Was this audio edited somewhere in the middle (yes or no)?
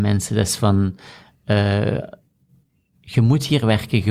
no